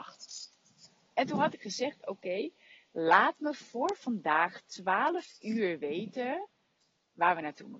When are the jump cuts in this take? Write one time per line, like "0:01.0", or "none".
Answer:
none